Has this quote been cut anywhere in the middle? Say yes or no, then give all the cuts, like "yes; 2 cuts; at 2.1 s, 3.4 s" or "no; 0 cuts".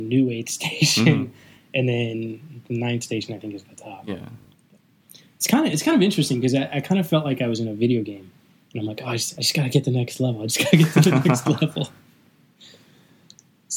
no; 0 cuts